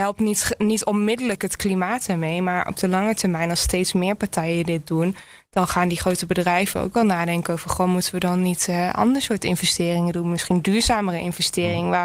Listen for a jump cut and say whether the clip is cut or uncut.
uncut